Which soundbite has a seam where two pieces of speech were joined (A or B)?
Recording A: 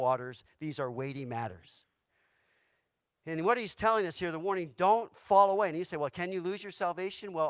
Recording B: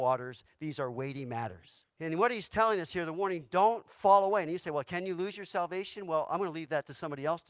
B